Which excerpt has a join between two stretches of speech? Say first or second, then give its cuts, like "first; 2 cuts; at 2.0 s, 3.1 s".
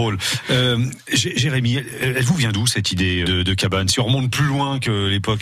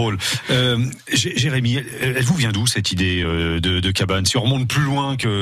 first; 1 cut; at 3.2 s